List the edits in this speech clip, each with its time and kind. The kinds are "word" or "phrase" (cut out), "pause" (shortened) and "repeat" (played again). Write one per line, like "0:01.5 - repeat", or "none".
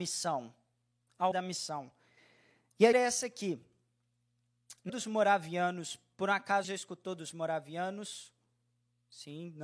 0:01.3 - word
0:02.9 - word
0:04.9 - word
0:06.6 - word